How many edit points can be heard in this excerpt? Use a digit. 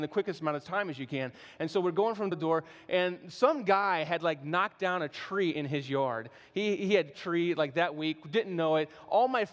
2